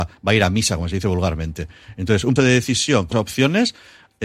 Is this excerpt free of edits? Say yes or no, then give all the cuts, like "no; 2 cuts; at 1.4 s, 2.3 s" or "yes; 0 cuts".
no; 2 cuts; at 2.4 s, 3.1 s